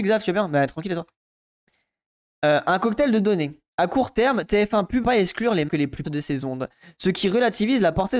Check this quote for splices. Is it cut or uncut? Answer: cut